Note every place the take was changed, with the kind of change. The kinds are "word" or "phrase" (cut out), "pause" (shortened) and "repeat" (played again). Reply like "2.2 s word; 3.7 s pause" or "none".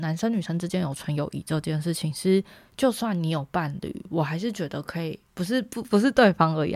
5.3 s pause